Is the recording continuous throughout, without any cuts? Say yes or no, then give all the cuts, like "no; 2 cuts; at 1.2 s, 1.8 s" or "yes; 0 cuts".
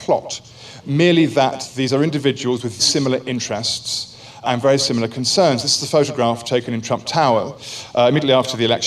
no; 2 cuts; at 2.8 s, 4.4 s